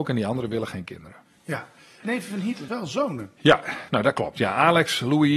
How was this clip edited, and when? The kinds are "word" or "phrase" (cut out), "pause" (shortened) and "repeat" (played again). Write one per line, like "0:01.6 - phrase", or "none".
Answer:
0:02.0 - word
0:02.7 - phrase